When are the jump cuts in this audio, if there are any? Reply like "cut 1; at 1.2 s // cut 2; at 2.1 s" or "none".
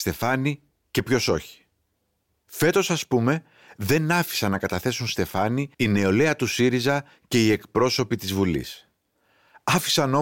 cut 1; at 5.7 s